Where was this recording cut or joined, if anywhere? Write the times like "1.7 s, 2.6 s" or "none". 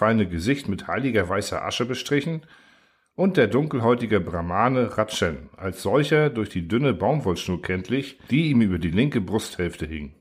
none

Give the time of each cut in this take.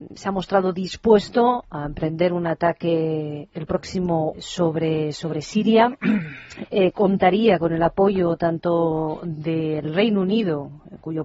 4.3 s, 6.7 s

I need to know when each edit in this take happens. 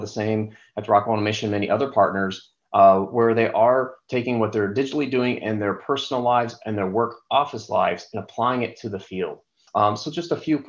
none

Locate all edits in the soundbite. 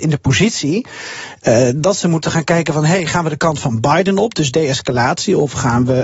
none

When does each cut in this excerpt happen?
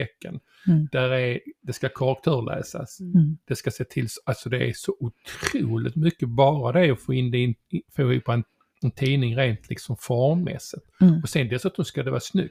none

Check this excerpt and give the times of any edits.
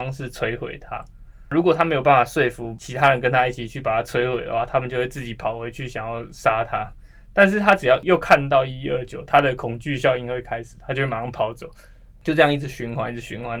none

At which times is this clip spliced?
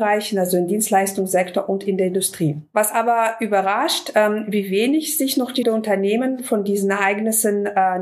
5.6 s

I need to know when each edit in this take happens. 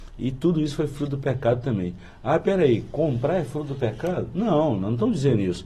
none

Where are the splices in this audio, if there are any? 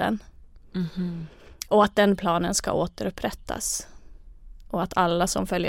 none

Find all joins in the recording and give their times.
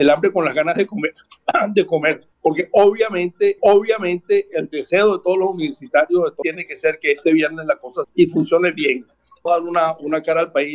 2.3 s, 3.6 s, 6.4 s, 8.0 s, 9.5 s

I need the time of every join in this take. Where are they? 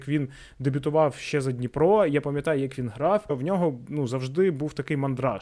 none

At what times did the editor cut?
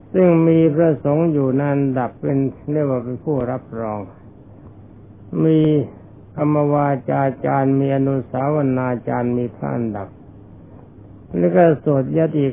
2.2 s

